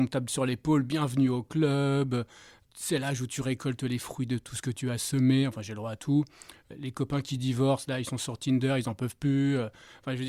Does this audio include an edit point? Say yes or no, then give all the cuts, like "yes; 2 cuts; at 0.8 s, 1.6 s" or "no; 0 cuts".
no; 0 cuts